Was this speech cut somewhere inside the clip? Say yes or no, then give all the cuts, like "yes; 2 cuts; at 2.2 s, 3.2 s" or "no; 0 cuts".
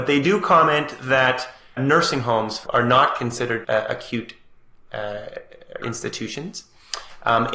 yes; 4 cuts; at 1.8 s, 2.7 s, 3.6 s, 5.8 s